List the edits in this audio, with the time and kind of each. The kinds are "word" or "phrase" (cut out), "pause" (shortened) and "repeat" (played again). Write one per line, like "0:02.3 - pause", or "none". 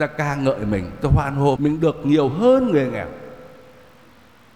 0:01.6 - word